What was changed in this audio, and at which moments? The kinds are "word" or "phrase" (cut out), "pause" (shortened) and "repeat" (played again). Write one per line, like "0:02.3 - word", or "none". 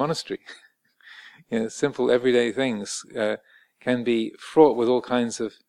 none

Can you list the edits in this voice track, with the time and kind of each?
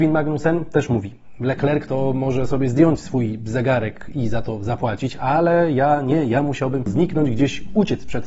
0:06.9 - word

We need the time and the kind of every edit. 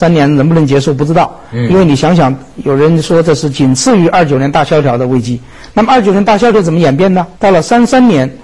0:07.3 - pause

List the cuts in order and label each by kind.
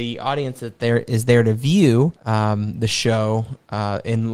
0:02.2 - pause

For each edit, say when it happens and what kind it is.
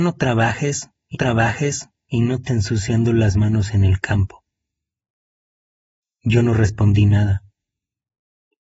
0:01.1 - repeat
0:02.5 - word

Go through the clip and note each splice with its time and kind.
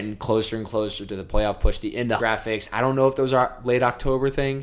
0:02.2 - word

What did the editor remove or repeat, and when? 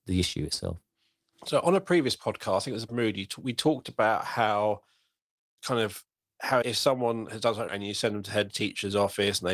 0:02.9 - phrase
0:06.6 - word
0:07.7 - word

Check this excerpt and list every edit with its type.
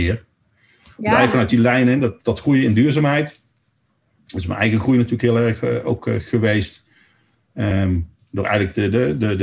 none

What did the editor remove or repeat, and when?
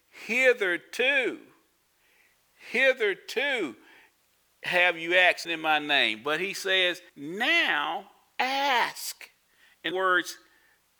0:05.4 - word
0:07.1 - pause
0:09.9 - word

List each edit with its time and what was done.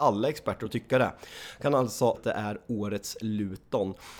0:02.1 - word

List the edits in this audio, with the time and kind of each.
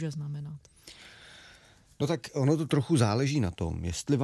none

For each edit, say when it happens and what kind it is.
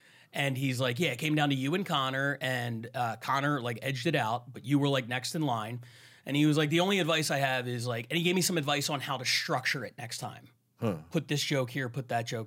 none

